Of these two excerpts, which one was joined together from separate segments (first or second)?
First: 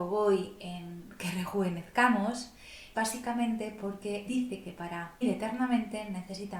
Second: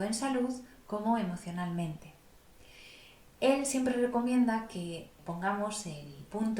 first